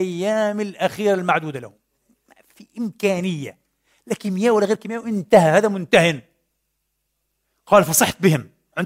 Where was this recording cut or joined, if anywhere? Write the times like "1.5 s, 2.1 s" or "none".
none